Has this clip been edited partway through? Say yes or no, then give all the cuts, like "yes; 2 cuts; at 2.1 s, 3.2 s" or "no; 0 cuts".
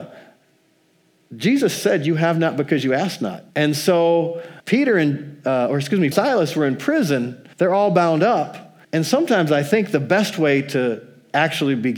yes; 6 cuts; at 1.8 s, 3.5 s, 4.6 s, 6.1 s, 7.5 s, 8.8 s